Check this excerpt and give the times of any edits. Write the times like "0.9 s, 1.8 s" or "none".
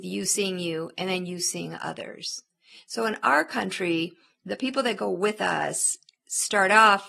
none